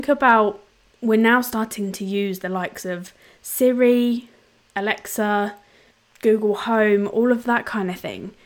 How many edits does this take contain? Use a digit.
0